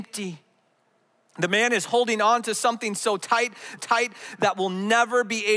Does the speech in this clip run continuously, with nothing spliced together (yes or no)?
no